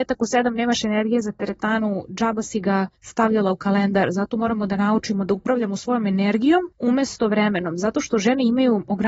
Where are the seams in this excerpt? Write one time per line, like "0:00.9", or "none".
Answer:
0:03.0
0:06.7